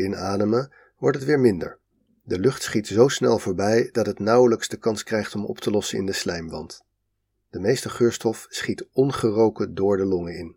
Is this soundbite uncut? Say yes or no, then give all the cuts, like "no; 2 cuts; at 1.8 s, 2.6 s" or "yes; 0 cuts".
yes; 0 cuts